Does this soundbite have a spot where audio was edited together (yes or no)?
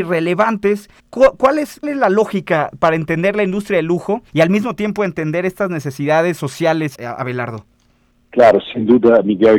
yes